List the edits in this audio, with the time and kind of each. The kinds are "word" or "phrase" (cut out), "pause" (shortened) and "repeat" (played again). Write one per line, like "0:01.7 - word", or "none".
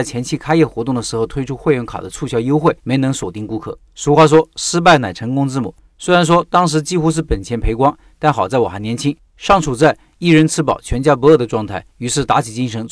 0:02.8 - pause
0:03.9 - pause
0:11.9 - pause